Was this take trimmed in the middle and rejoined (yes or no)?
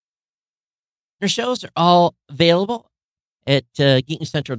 yes